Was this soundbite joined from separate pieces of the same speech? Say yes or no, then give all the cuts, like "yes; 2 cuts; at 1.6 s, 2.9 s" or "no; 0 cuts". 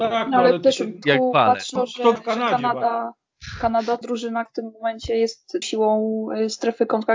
yes; 6 cuts; at 1.0 s, 1.8 s, 2.2 s, 4.0 s, 4.5 s, 5.6 s